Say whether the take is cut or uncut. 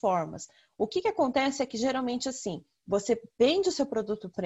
uncut